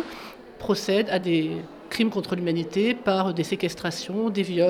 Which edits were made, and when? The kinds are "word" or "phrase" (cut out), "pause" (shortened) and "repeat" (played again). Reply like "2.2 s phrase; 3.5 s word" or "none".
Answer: none